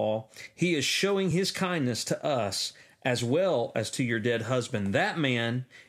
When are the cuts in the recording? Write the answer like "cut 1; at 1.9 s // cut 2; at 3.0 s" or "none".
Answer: none